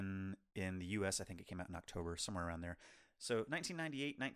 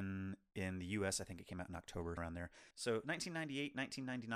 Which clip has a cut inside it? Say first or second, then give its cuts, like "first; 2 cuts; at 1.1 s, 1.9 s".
second; 2 cuts; at 2.2 s, 2.7 s